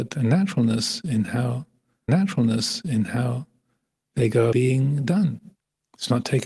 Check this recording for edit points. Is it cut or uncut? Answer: cut